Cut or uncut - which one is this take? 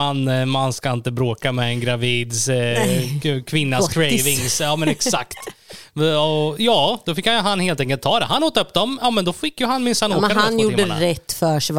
uncut